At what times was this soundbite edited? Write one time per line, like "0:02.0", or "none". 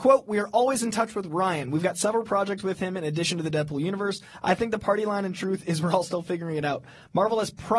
none